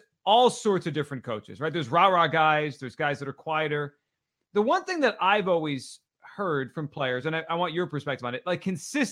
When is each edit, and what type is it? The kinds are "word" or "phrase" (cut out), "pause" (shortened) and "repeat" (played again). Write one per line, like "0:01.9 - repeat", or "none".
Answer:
none